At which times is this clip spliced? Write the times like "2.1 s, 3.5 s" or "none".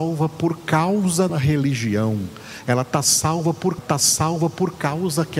1.3 s, 3.8 s